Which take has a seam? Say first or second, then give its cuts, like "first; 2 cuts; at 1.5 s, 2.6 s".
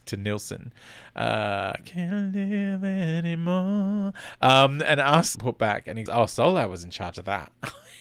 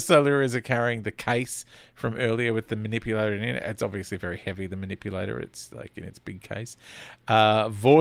first; 2 cuts; at 5.3 s, 6.1 s